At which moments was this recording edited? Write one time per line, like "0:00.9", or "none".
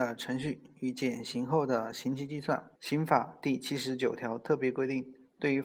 0:02.8